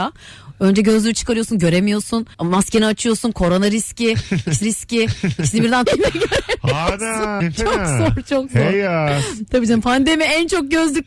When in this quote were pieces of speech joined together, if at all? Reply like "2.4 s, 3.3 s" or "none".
2.3 s, 4.6 s, 5.9 s, 7.4 s